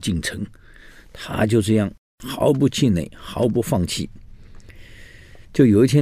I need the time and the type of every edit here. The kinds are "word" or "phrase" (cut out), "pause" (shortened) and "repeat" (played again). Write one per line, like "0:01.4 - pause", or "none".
0:02.1 - pause